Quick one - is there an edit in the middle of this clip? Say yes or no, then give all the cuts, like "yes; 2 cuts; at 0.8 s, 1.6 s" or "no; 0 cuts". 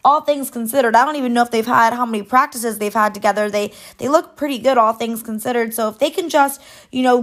no; 0 cuts